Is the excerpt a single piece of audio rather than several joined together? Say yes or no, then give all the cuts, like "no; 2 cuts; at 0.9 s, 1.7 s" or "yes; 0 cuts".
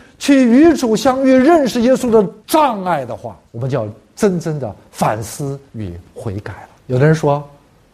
no; 4 cuts; at 2.4 s, 3.5 s, 5.7 s, 6.8 s